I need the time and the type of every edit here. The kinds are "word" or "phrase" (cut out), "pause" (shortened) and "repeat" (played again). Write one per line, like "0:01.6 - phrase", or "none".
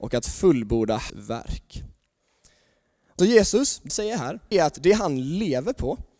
0:01.1 - word
0:03.2 - word
0:03.9 - word
0:04.5 - word